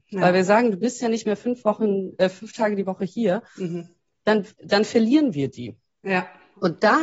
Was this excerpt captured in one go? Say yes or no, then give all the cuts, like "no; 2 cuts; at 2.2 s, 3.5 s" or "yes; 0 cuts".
yes; 0 cuts